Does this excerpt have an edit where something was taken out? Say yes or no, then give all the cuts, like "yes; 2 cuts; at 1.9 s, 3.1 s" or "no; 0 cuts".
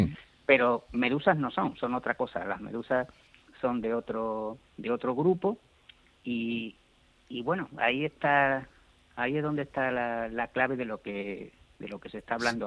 no; 0 cuts